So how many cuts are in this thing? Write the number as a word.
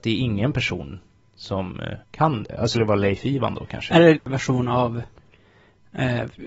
three